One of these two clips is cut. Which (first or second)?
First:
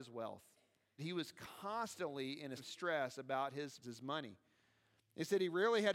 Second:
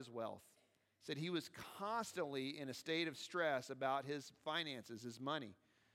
first